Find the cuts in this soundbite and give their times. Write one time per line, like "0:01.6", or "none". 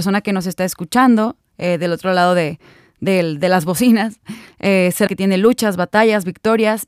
0:05.1